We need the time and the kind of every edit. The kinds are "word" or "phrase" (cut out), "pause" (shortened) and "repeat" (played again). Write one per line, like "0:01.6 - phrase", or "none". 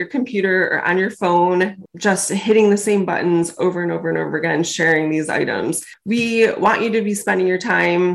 none